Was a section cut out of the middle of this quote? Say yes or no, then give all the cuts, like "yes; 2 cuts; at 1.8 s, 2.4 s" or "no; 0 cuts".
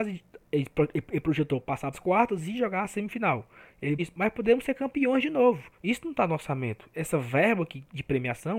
yes; 3 cuts; at 1.9 s, 4.0 s, 5.7 s